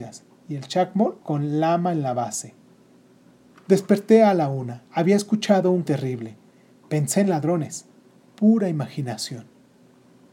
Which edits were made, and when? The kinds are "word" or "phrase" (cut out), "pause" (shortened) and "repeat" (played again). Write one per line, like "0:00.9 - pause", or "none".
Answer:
0:01.2 - pause
0:04.9 - pause
0:05.9 - word